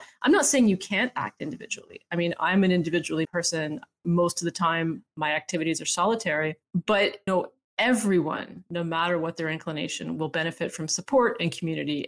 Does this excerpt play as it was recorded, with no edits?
no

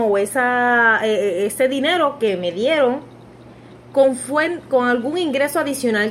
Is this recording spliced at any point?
no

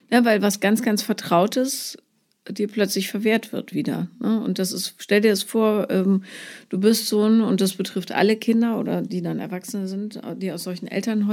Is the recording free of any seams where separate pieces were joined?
yes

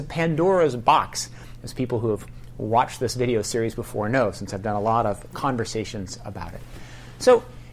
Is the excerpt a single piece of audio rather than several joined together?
yes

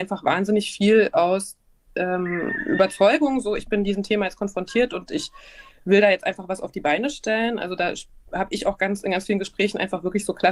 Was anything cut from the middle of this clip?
no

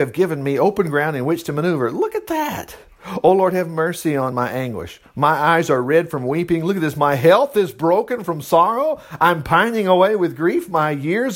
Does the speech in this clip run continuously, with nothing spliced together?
no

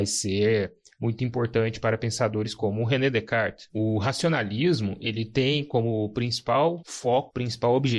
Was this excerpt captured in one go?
yes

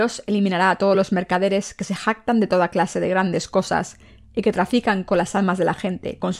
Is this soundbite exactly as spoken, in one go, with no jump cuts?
yes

